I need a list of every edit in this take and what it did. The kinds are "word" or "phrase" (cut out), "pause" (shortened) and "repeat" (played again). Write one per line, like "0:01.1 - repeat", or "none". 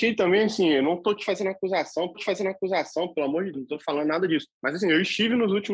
0:02.1 - repeat
0:03.5 - word
0:04.5 - pause